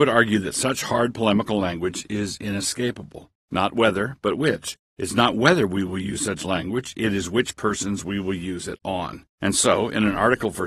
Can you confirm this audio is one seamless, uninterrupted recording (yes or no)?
no